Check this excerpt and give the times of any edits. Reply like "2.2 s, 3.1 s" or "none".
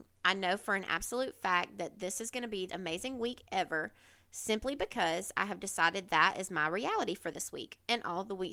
2.7 s, 6.1 s